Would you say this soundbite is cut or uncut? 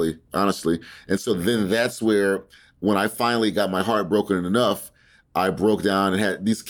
uncut